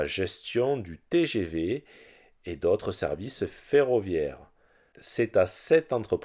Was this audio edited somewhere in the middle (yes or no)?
no